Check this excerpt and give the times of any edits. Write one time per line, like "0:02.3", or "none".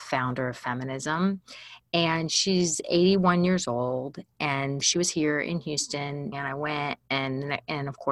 0:04.8
0:06.3